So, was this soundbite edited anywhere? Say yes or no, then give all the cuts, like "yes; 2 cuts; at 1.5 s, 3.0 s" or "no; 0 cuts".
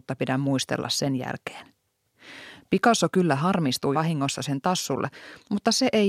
yes; 1 cut; at 3.9 s